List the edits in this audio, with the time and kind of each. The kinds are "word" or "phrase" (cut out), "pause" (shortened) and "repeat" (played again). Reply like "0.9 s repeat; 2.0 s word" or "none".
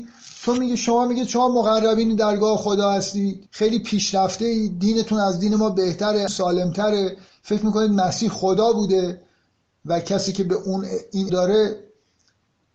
3.5 s pause; 6.3 s word; 11.3 s word